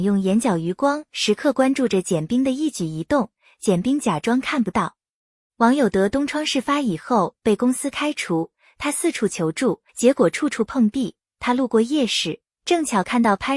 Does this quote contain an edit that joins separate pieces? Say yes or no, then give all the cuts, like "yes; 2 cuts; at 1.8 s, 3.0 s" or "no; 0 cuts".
yes; 1 cut; at 9.9 s